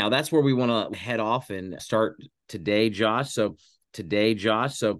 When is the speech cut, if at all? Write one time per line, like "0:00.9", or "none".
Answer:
0:00.9
0:01.8
0:03.8